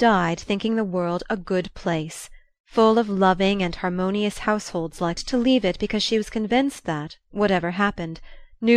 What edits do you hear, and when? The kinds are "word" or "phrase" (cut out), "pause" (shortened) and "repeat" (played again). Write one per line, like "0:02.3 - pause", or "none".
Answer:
0:05.2 - phrase